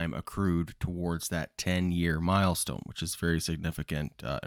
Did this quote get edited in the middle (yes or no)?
no